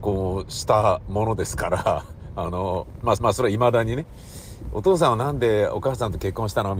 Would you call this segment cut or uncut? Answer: cut